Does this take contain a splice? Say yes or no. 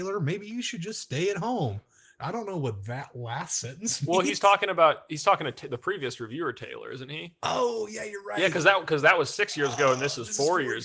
no